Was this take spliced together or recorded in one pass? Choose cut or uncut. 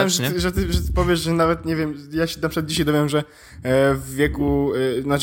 uncut